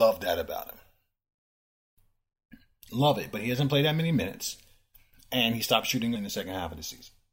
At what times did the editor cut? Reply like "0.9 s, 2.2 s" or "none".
6.2 s